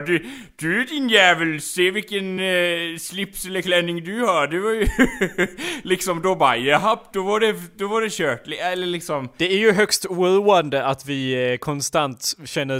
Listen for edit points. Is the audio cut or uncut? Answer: uncut